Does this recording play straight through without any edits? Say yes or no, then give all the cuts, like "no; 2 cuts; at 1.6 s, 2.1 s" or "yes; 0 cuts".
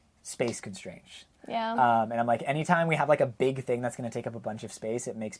yes; 0 cuts